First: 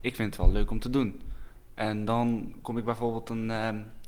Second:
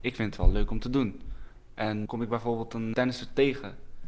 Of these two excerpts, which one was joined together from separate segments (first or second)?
second